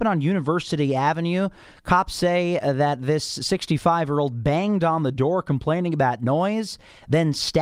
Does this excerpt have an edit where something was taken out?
no; 0 cuts

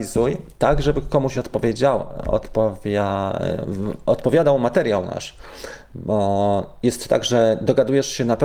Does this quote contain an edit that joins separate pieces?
no; 0 cuts

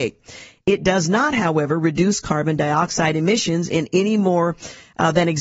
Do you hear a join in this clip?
no; 0 cuts

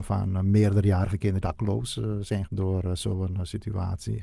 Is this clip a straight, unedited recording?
no; 2 cuts; at 1.4 s, 2.5 s

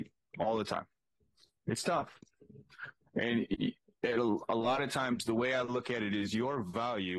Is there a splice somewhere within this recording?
no; 0 cuts

